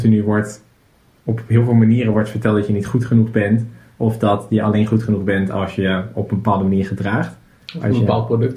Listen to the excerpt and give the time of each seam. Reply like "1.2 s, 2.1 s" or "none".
none